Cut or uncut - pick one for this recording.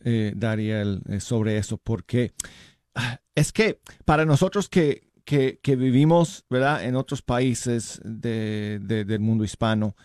uncut